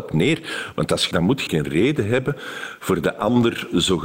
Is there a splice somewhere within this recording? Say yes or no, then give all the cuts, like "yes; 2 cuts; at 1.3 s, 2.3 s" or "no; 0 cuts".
yes; 2 cuts; at 1.1 s, 1.5 s